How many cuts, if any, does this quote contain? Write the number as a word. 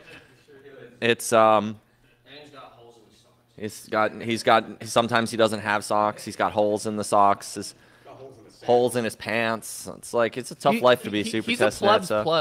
zero